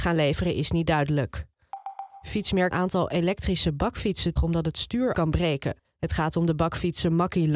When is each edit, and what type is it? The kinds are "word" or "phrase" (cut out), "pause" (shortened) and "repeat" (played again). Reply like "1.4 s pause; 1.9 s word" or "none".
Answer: 2.7 s phrase; 4.4 s word; 5.1 s word